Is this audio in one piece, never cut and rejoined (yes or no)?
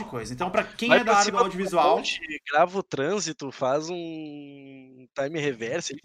yes